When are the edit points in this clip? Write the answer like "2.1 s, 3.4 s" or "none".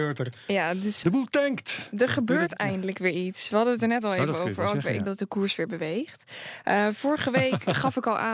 1.0 s, 5.1 s